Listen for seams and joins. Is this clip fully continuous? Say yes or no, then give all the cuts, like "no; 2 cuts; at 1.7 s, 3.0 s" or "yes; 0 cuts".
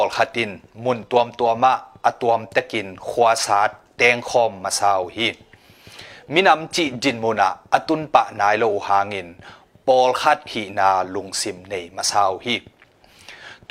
yes; 0 cuts